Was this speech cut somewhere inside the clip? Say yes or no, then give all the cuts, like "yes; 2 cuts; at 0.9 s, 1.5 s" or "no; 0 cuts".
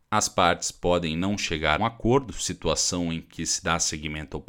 yes; 1 cut; at 1.8 s